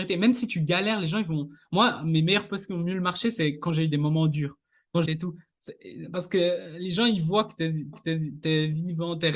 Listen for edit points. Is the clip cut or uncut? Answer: cut